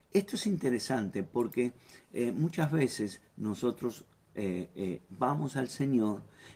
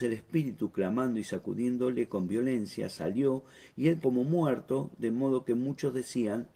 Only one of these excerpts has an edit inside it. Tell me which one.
second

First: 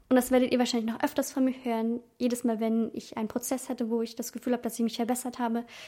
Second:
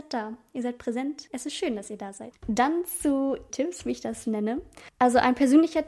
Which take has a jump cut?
second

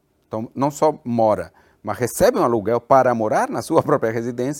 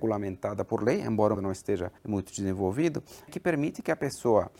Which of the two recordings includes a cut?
second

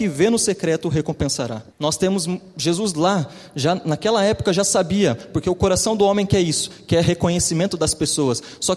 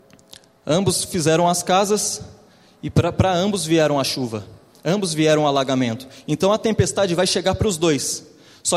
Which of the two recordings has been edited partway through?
first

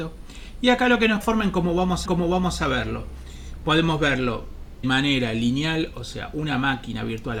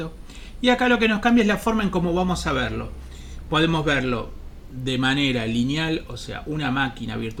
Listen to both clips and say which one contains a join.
first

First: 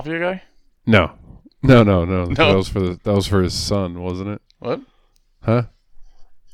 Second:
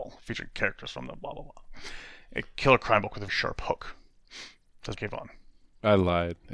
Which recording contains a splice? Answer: second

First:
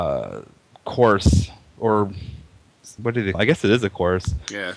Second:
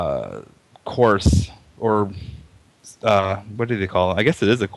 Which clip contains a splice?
first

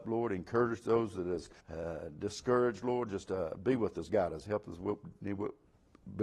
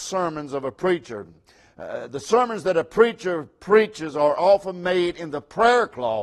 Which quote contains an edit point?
first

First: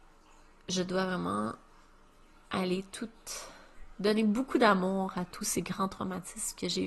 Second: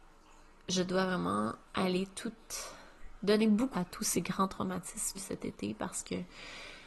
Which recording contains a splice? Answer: second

